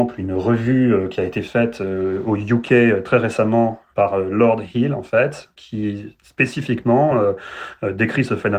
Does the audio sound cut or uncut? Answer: uncut